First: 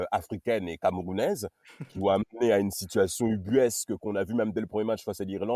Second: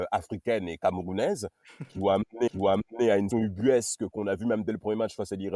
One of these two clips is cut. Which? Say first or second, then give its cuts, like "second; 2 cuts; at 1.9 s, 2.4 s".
second; 2 cuts; at 2.5 s, 3.3 s